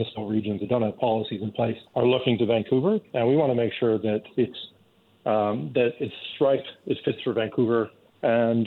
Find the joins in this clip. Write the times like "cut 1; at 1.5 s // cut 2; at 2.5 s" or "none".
cut 1; at 1.9 s